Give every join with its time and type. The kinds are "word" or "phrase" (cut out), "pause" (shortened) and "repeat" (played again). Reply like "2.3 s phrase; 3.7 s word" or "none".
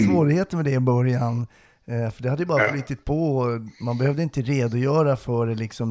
none